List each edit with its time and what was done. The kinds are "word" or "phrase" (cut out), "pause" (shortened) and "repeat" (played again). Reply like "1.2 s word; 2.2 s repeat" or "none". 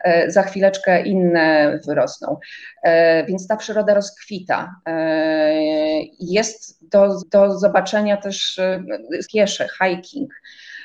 1.8 s phrase; 7.2 s repeat; 9.2 s phrase